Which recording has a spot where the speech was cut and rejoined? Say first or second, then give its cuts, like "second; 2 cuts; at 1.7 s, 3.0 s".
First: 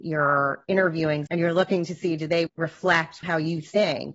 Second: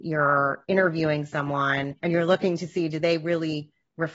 first; 2 cuts; at 1.3 s, 2.5 s